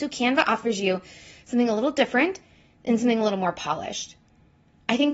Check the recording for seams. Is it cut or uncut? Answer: uncut